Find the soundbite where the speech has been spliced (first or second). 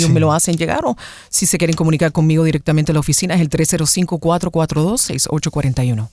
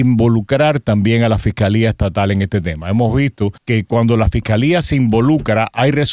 second